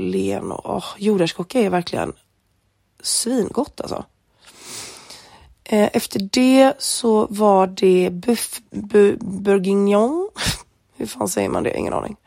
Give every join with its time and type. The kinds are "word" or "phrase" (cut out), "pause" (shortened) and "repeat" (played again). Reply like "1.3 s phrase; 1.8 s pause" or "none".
8.7 s pause

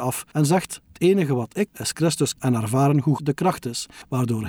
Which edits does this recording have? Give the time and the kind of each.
0.9 s word; 1.7 s word; 2.4 s word; 3.2 s word

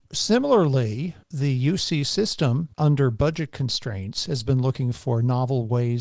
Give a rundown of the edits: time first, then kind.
1.2 s pause; 2.7 s pause

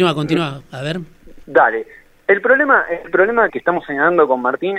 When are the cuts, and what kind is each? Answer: 1.4 s pause; 3.5 s word

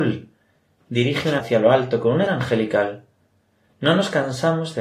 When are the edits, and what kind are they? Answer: 1.4 s word; 2.3 s word

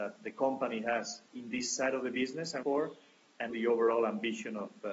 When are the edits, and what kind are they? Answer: 1.3 s pause; 2.6 s word; 3.5 s word

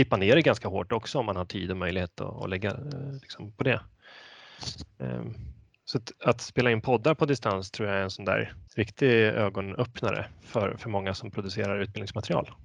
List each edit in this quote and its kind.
8.7 s pause

